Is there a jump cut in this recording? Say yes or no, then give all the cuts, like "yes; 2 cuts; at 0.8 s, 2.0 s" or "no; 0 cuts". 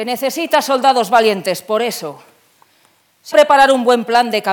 yes; 1 cut; at 3.3 s